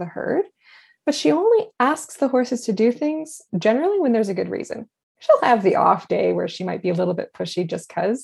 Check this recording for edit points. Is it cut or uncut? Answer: cut